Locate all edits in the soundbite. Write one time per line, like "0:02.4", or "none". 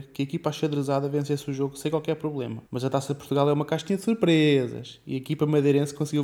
0:02.7